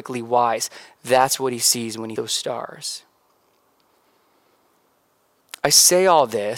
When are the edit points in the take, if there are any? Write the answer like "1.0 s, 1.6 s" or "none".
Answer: 2.2 s